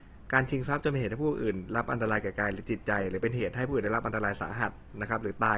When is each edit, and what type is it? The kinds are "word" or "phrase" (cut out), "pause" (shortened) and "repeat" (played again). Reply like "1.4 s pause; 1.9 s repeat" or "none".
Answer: none